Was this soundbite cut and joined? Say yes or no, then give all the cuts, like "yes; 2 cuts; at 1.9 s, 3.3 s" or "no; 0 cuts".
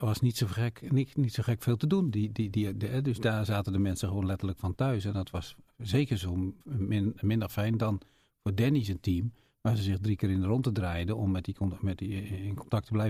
yes; 1 cut; at 6.6 s